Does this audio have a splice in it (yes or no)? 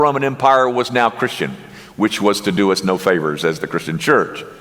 no